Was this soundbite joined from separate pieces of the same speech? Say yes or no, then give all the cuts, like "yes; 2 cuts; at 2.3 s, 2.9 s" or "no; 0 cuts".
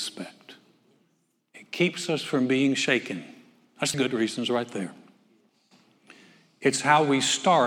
yes; 1 cut; at 3.9 s